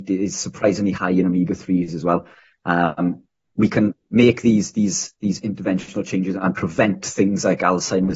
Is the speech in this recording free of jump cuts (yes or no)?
yes